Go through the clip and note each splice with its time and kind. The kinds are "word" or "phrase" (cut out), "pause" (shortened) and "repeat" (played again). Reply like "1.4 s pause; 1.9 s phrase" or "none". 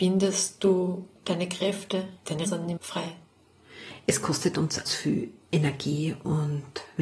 1.2 s pause; 2.5 s word; 2.8 s word; 4.9 s phrase